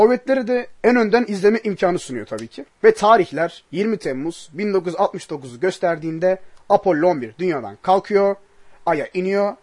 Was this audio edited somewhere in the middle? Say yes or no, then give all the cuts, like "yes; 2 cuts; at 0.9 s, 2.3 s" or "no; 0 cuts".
no; 0 cuts